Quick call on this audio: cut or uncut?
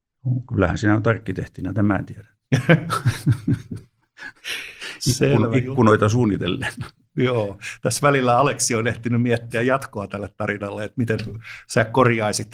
uncut